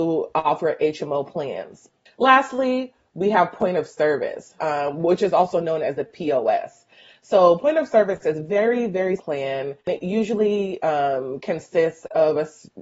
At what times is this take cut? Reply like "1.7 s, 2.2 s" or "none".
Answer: 4.6 s, 9.2 s